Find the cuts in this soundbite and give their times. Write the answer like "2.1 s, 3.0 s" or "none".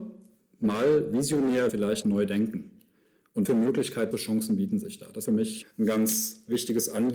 1.7 s, 2.0 s, 3.5 s, 4.1 s, 5.3 s, 5.6 s